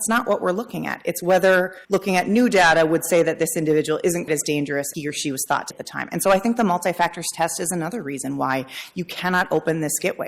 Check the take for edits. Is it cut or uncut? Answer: cut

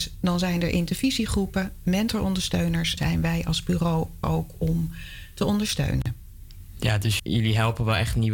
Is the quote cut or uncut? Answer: cut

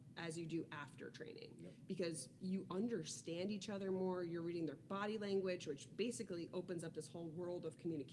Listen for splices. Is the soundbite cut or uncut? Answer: uncut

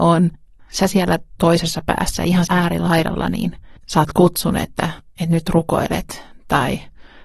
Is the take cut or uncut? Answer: cut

